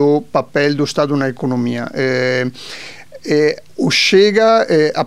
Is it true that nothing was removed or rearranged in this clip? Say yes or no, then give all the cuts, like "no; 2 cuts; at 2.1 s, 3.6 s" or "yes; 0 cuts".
no; 1 cut; at 3.7 s